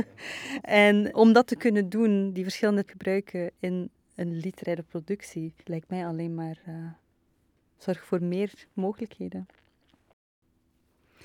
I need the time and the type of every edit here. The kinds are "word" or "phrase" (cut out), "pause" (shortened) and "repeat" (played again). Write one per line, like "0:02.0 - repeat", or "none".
0:01.1 - word
0:02.9 - word
0:05.6 - pause